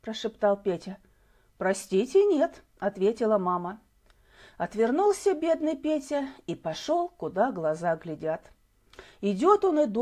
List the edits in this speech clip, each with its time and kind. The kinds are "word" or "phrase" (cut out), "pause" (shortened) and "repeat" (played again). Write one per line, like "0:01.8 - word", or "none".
none